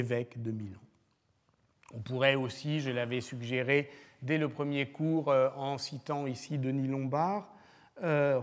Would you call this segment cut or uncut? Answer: uncut